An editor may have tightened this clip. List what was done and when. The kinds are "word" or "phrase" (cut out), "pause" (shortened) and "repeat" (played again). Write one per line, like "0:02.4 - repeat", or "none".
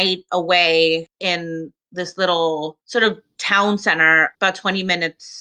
0:04.3 - word